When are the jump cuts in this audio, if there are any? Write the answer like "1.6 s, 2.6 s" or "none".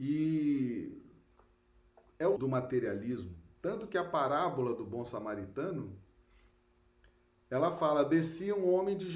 2.4 s